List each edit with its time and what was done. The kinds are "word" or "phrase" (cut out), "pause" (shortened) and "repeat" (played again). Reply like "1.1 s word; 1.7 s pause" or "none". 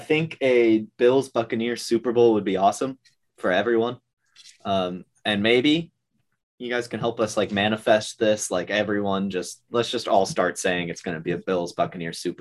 none